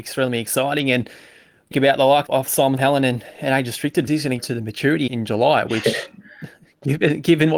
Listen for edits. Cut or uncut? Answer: cut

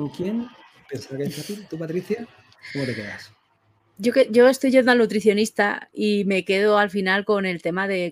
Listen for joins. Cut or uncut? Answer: uncut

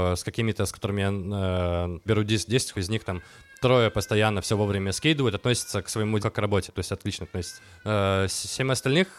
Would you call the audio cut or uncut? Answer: cut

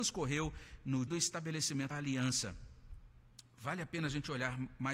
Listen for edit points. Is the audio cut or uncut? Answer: cut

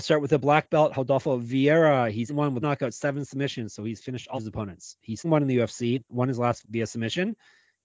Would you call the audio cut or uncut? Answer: cut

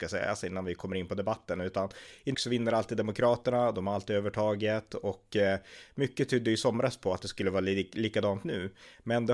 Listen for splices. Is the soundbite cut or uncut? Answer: cut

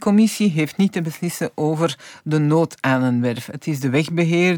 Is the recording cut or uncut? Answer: uncut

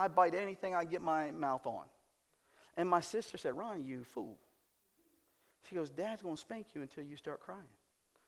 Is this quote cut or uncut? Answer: uncut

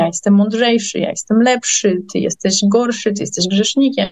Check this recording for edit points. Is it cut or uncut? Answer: uncut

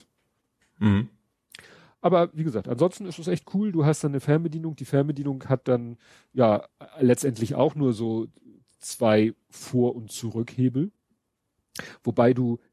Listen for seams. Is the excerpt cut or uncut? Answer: uncut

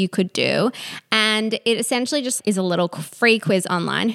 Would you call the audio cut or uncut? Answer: uncut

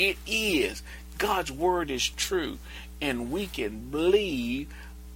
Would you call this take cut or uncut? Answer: uncut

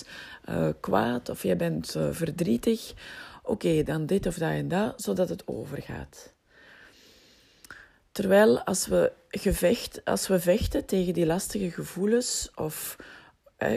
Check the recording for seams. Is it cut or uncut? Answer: uncut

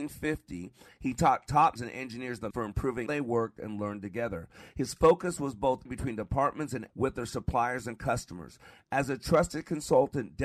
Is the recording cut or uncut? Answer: cut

